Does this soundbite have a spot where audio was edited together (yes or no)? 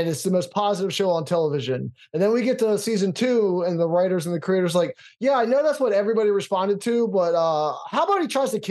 no